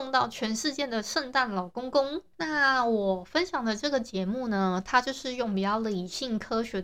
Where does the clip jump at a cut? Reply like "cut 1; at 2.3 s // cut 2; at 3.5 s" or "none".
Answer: cut 1; at 2.3 s

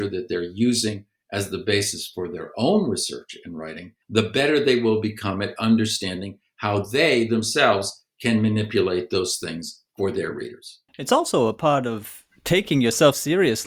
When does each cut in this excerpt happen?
cut 1; at 4.0 s // cut 2; at 10.9 s

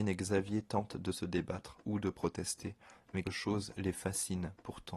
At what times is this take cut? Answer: cut 1; at 3.2 s

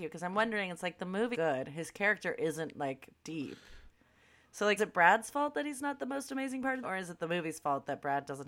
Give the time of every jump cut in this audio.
cut 1; at 1.3 s // cut 2; at 3.1 s // cut 3; at 4.8 s // cut 4; at 6.8 s

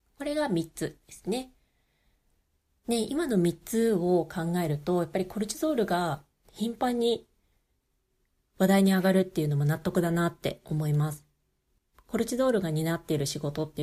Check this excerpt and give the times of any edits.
cut 1; at 11.8 s

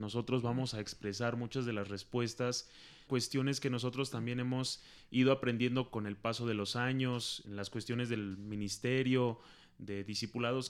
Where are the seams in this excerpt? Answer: cut 1; at 3.1 s // cut 2; at 7.4 s

